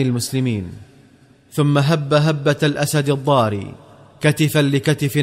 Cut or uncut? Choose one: uncut